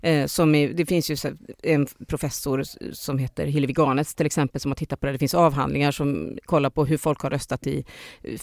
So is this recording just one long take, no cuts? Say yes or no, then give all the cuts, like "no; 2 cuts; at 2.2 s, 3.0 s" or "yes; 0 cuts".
yes; 0 cuts